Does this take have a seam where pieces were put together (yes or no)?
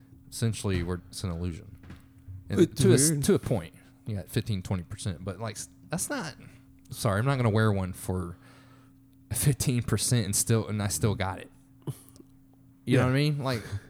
yes